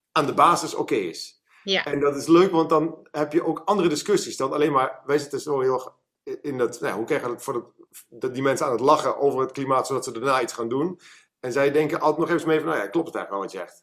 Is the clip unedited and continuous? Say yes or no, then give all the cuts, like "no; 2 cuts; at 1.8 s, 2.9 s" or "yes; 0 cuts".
yes; 0 cuts